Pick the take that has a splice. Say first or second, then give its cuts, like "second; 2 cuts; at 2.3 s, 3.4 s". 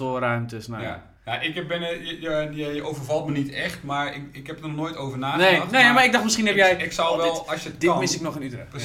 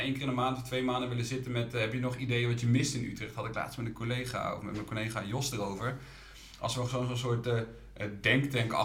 first; 1 cut; at 1.2 s